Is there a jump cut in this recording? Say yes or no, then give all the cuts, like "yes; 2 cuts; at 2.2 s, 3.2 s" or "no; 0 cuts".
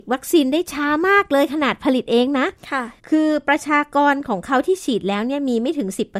yes; 1 cut; at 3.0 s